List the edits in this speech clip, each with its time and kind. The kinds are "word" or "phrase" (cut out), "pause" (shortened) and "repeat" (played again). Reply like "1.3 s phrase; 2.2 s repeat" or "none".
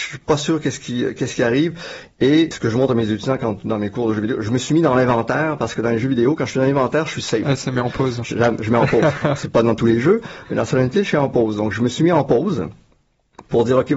2.5 s word